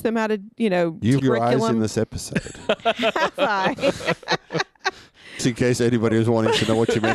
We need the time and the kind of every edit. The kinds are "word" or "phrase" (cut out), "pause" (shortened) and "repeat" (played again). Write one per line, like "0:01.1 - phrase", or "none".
0:01.2 - word
0:05.4 - word